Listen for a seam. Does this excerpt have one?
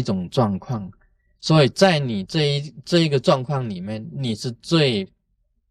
no; 0 cuts

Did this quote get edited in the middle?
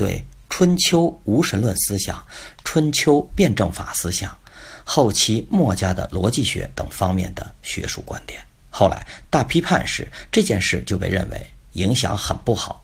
yes; 1 cut; at 8.6 s

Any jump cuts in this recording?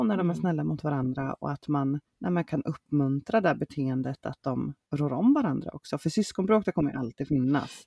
no; 0 cuts

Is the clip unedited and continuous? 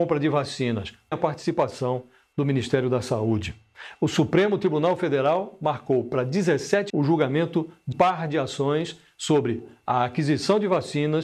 no; 3 cuts; at 1.1 s, 6.9 s, 7.9 s

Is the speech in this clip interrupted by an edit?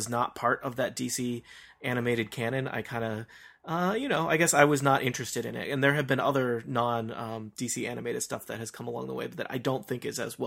no; 0 cuts

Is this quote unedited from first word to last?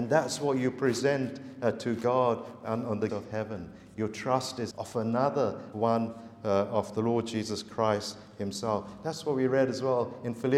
no; 3 cuts; at 3.1 s, 4.7 s, 5.7 s

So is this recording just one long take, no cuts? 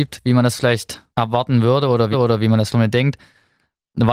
no; 3 cuts; at 1.1 s, 2.1 s, 2.7 s

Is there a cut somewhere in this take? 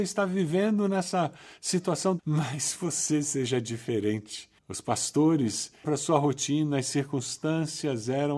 yes; 3 cuts; at 2.2 s, 4.6 s, 5.8 s

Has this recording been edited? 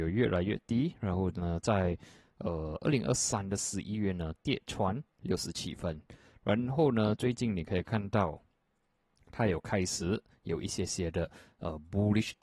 no; 0 cuts

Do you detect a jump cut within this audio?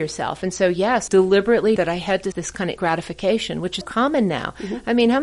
yes; 5 cuts; at 1.1 s, 1.8 s, 2.3 s, 2.8 s, 3.8 s

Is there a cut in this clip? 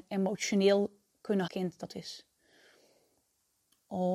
yes; 2 cuts; at 1.5 s, 1.9 s

